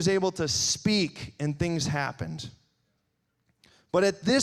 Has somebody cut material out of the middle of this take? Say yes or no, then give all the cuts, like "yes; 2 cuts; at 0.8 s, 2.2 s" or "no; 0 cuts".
no; 0 cuts